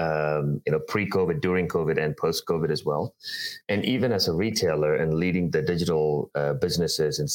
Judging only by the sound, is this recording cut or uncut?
uncut